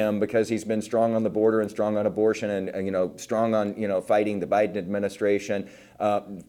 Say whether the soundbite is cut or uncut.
uncut